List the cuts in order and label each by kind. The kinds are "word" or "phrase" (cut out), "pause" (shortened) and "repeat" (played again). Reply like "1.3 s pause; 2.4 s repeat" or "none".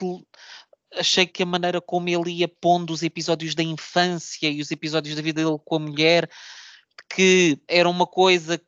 1.3 s word; 7.7 s word